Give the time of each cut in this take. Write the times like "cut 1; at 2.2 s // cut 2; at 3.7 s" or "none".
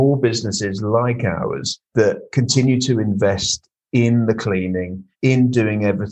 cut 1; at 1.8 s // cut 2; at 5.1 s

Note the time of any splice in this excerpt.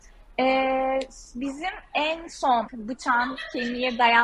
cut 1; at 2.7 s

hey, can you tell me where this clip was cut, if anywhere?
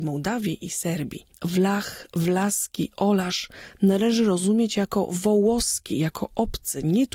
none

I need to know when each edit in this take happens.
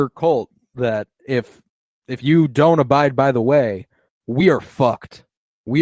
none

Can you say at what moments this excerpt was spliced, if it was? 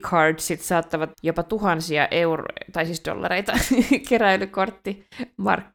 cut 1; at 1.1 s

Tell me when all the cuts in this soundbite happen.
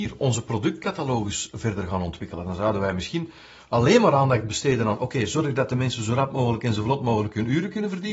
none

